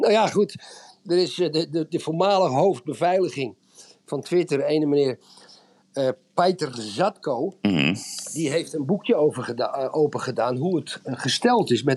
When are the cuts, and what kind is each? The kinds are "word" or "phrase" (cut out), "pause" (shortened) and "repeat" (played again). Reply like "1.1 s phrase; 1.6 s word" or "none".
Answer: none